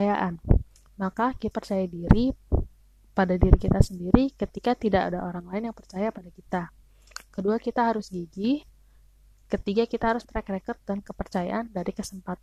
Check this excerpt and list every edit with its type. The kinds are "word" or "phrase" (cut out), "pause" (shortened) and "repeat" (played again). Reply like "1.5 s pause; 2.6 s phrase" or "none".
1.5 s word; 10.2 s word